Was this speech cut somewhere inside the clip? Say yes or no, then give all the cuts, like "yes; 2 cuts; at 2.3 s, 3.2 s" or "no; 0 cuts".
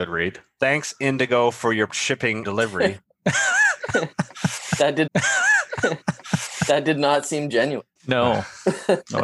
yes; 4 cuts; at 1.9 s, 2.4 s, 5.1 s, 8.0 s